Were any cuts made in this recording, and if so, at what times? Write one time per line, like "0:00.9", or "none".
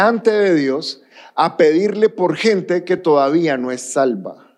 none